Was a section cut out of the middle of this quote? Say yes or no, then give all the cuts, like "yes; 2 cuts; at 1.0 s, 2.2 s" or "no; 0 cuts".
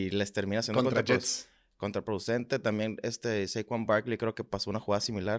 no; 0 cuts